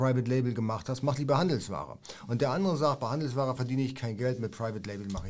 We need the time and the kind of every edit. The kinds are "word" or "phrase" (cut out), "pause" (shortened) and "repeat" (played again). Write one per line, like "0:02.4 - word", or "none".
none